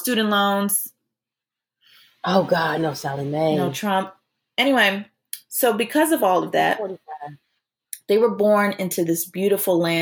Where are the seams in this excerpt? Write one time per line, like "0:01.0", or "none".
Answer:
none

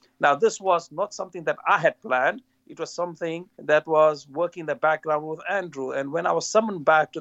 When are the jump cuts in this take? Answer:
0:03.5

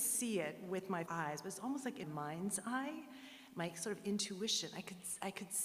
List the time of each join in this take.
0:01.1
0:02.0

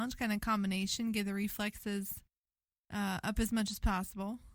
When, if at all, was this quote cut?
none

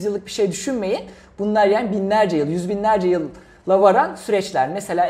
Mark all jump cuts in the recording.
none

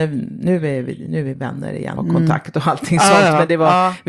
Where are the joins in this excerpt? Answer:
0:01.3
0:02.0

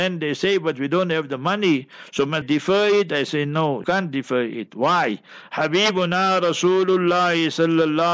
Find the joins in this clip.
0:02.4
0:03.8

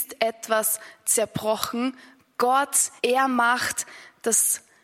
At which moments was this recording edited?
0:03.0

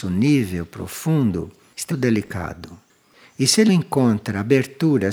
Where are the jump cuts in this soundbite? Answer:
0:01.9
0:03.7

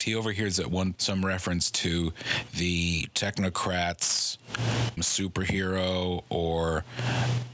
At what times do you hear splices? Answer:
0:01.0
0:05.0

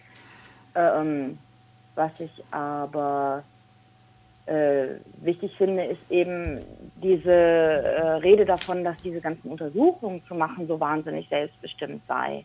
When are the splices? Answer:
none

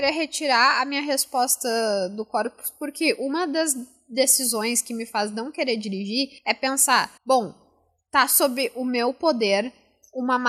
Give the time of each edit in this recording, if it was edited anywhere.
0:06.4
0:07.2

